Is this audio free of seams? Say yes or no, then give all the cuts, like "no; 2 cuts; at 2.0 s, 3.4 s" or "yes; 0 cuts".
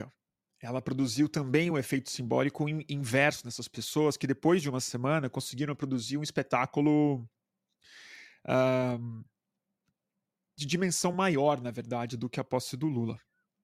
yes; 0 cuts